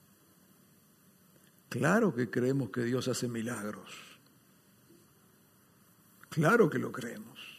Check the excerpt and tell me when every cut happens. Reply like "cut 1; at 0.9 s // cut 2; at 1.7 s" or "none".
none